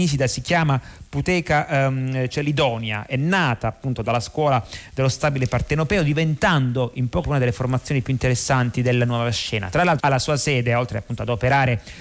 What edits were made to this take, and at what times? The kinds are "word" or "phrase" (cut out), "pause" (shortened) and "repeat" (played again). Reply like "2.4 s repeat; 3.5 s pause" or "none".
7.2 s word; 10.0 s phrase